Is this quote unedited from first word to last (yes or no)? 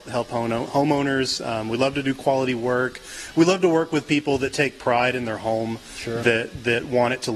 yes